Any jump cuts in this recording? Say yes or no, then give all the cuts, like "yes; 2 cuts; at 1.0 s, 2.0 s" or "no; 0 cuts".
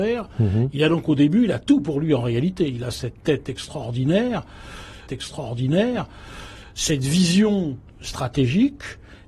yes; 2 cuts; at 5.1 s, 7.9 s